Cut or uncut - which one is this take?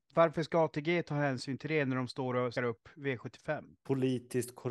cut